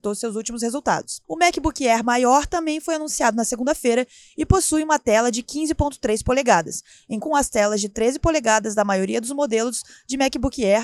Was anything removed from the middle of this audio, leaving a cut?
yes; 2 cuts; at 1.2 s, 7.2 s

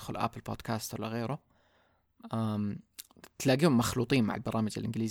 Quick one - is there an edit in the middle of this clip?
no; 0 cuts

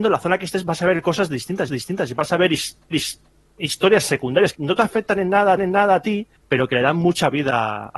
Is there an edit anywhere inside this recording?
yes; 5 cuts; at 1.7 s, 2.9 s, 4.5 s, 5.6 s, 6.4 s

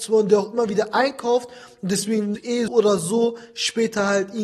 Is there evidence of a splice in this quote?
yes; 2 cuts; at 2.3 s, 2.7 s

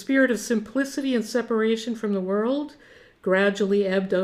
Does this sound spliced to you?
no; 0 cuts

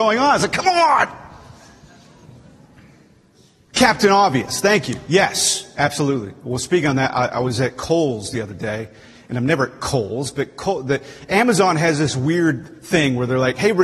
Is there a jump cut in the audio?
no; 0 cuts

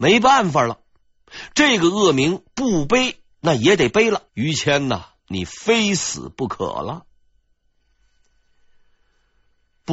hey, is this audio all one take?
no; 2 cuts; at 4.3 s, 5.2 s

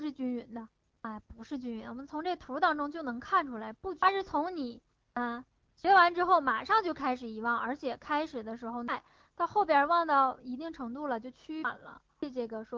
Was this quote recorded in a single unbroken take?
yes; 0 cuts

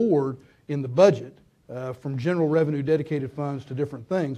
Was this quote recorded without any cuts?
yes; 0 cuts

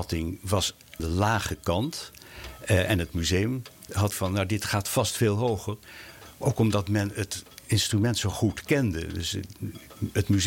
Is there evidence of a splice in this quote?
yes; 2 cuts; at 1.0 s, 4.1 s

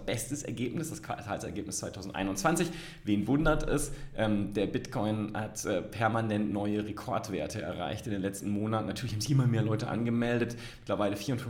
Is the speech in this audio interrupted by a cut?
no; 0 cuts

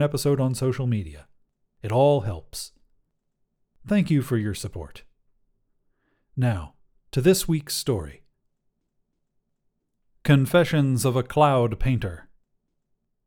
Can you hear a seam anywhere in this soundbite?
no; 0 cuts

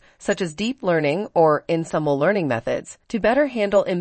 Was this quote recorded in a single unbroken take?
no; 1 cut; at 3.0 s

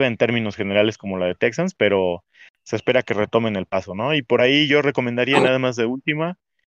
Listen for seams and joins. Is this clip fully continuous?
yes; 0 cuts

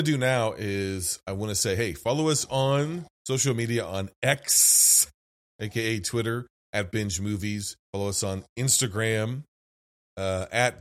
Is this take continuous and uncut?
no; 2 cuts; at 3.1 s, 7.8 s

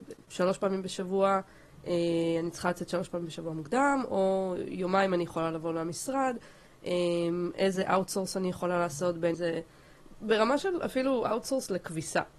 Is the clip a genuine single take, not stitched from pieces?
no; 1 cut; at 9.3 s

